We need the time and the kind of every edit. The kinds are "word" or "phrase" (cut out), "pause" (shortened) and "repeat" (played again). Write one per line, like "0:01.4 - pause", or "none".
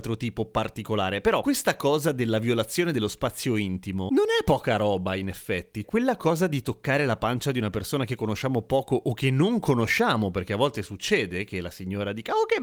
0:05.8 - word

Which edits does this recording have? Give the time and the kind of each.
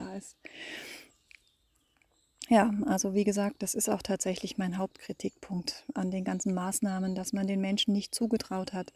none

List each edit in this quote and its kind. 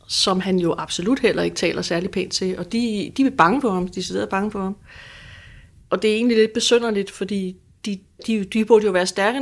none

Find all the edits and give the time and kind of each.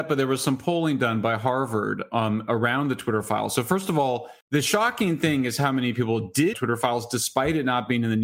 0:04.4 - pause
0:06.5 - phrase

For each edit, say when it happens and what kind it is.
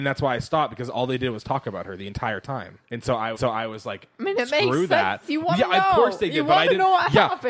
0:02.8 - pause
0:03.4 - repeat

